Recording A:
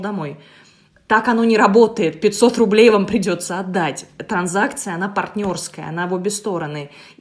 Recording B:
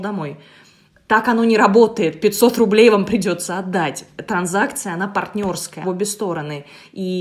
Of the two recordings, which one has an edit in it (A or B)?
B